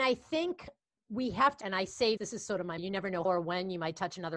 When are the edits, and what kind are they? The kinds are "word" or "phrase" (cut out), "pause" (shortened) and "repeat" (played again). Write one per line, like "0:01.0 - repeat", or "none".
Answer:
0:01.0 - word
0:01.6 - word
0:02.2 - word
0:02.8 - word
0:03.2 - word